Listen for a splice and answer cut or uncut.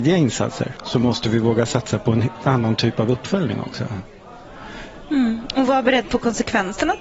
uncut